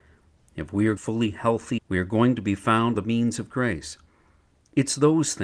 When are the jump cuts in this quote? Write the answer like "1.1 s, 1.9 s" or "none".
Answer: 1.0 s, 1.8 s, 2.9 s